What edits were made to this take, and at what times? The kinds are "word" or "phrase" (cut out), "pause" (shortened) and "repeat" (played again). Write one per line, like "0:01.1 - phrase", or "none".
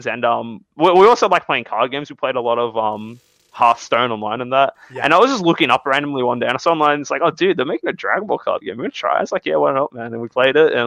none